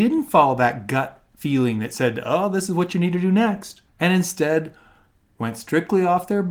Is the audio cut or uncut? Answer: cut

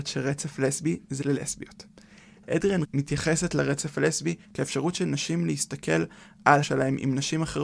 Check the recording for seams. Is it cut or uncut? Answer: cut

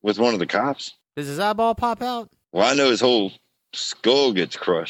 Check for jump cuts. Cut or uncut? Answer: uncut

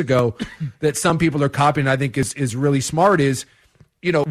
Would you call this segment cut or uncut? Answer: uncut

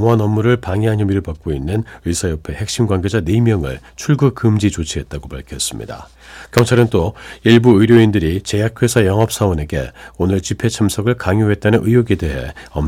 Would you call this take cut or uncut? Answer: uncut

